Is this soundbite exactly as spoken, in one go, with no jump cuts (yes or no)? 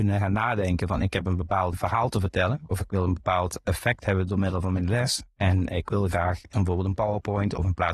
no